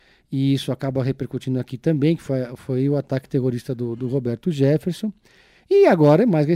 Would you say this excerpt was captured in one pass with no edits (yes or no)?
yes